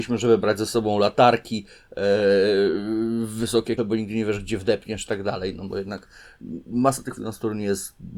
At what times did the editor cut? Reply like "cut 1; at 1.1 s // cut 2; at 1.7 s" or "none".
cut 1; at 3.8 s // cut 2; at 7.2 s